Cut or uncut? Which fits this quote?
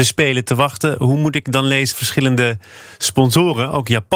cut